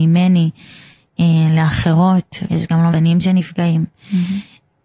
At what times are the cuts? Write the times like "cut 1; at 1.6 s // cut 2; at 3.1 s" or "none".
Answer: cut 1; at 2.4 s // cut 2; at 2.9 s